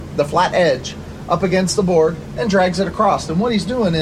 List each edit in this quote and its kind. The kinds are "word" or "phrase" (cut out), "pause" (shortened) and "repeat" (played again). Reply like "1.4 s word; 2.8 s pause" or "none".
none

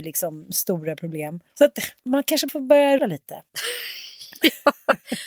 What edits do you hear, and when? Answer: 1.5 s pause; 2.0 s pause; 2.5 s word; 3.0 s word; 3.5 s pause

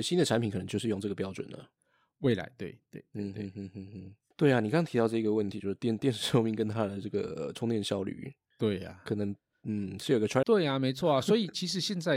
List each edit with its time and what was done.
10.4 s word

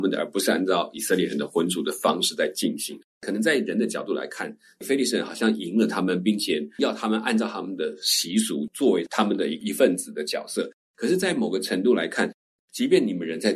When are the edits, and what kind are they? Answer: none

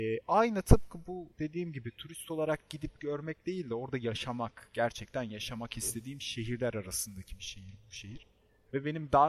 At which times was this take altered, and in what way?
none

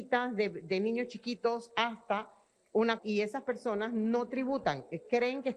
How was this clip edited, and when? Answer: 3.0 s word

